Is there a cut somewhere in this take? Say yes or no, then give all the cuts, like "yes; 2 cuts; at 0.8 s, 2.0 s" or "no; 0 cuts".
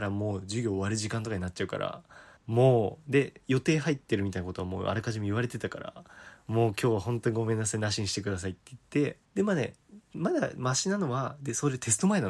yes; 2 cuts; at 2.4 s, 9.2 s